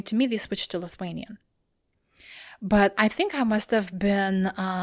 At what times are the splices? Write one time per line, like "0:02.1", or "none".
none